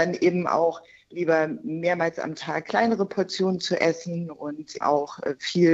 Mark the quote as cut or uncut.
cut